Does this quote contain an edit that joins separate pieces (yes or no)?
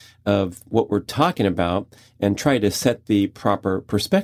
no